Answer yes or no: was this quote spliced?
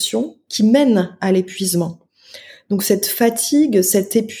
no